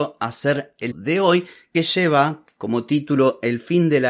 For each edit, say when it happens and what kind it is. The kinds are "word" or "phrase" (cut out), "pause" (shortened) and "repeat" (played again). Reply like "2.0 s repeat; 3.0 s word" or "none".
0.9 s word; 1.7 s word

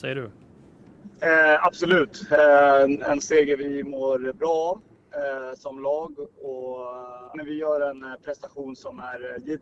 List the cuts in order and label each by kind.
7.3 s word

